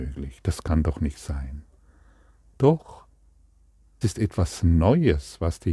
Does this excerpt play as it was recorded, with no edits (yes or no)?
no